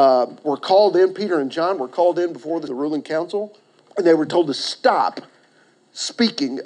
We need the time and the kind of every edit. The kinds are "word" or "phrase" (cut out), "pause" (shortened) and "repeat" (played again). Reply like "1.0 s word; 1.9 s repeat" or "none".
2.7 s word; 3.8 s pause